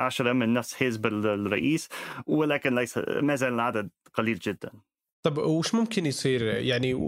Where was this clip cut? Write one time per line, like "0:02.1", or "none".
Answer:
none